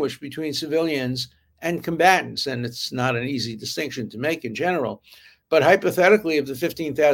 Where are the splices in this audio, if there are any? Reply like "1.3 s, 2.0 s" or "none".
none